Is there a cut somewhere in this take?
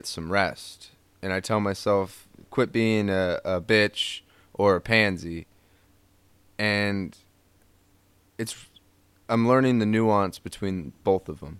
no; 0 cuts

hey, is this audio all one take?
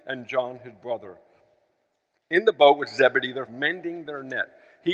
no; 1 cut; at 3.5 s

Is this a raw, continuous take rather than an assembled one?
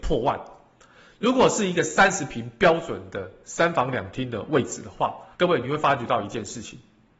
no; 1 cut; at 5.3 s

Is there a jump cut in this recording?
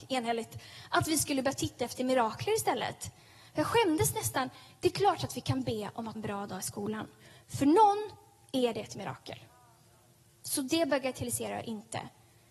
yes; 1 cut; at 6.1 s

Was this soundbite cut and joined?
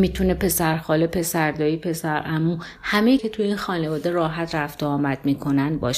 yes; 1 cut; at 3.2 s

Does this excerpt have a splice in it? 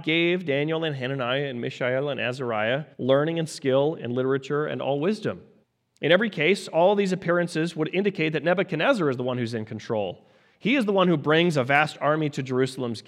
yes; 2 cuts; at 2.9 s, 5.6 s

